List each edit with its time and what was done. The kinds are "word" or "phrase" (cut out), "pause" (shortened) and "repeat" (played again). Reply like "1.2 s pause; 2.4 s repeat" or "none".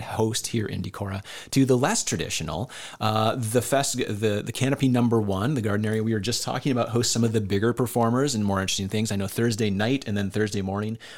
none